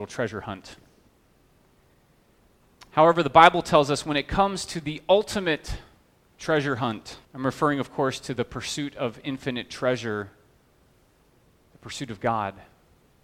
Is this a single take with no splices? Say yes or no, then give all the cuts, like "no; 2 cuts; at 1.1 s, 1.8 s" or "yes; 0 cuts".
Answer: no; 1 cut; at 7.2 s